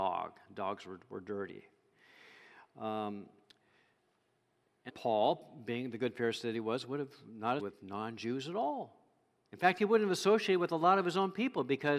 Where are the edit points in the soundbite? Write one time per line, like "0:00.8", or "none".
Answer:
0:04.9
0:07.6